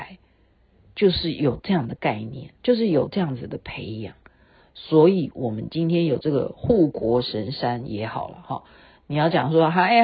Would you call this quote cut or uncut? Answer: cut